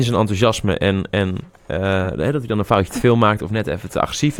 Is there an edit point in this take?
no; 0 cuts

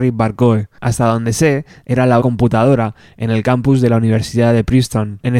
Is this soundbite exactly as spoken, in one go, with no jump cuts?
no; 1 cut; at 2.2 s

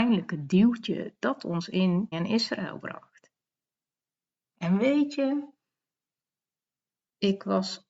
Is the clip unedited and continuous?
no; 1 cut; at 2.1 s

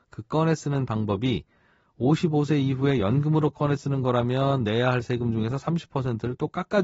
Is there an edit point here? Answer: no; 0 cuts

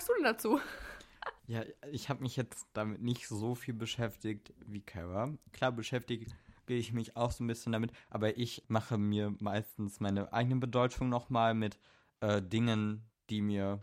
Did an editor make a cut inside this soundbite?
yes; 1 cut; at 1.4 s

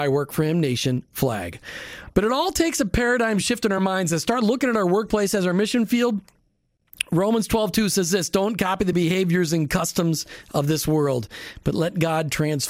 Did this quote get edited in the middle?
no; 0 cuts

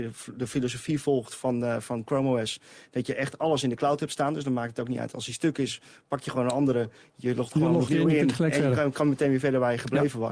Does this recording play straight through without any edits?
yes; 0 cuts

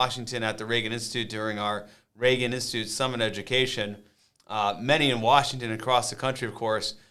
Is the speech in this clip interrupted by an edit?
no; 0 cuts

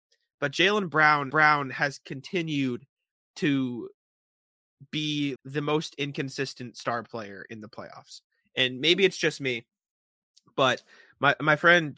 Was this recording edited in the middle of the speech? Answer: yes; 2 cuts; at 1.3 s, 5.4 s

